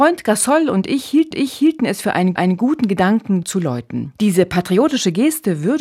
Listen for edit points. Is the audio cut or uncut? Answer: cut